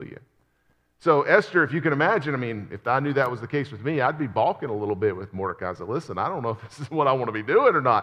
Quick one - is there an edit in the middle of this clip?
no; 0 cuts

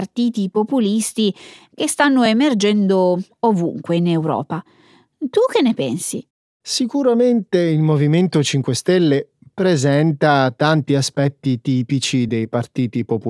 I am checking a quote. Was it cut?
no; 0 cuts

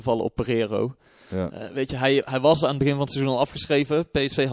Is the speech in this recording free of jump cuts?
yes; 0 cuts

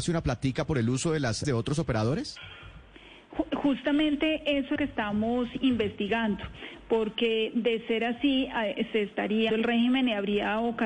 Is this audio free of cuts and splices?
no; 3 cuts; at 1.4 s, 4.8 s, 9.5 s

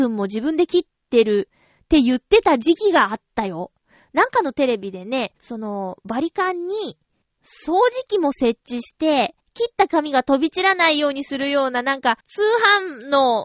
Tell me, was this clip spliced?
yes; 4 cuts; at 5.4 s, 7.2 s, 9.4 s, 12.2 s

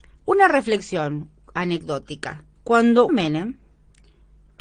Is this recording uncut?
no; 1 cut; at 3.1 s

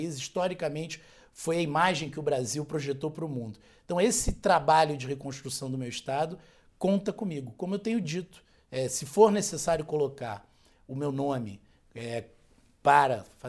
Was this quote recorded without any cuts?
yes; 0 cuts

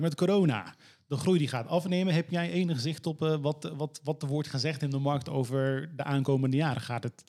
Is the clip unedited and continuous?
yes; 0 cuts

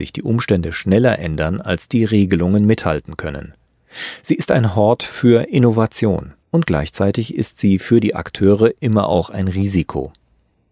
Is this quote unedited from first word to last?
no; 1 cut; at 6.4 s

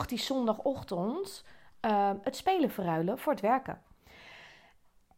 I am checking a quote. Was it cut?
no; 0 cuts

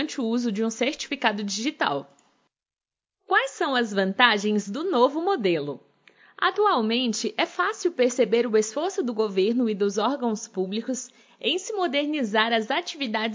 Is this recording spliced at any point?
no; 0 cuts

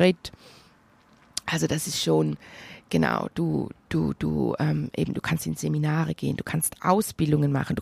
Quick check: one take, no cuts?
no; 1 cut; at 3.8 s

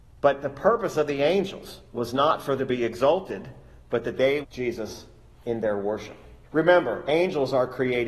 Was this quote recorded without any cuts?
no; 4 cuts; at 1.9 s, 2.6 s, 4.4 s, 6.4 s

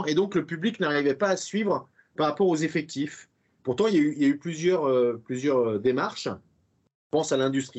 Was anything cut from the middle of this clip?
no; 0 cuts

